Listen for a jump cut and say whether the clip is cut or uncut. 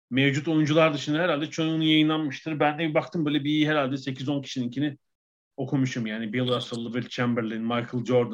uncut